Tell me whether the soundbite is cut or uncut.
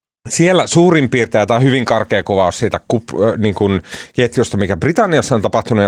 uncut